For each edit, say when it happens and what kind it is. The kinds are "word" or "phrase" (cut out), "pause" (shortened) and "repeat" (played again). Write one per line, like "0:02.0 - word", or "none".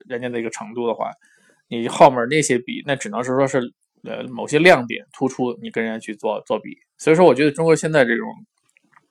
none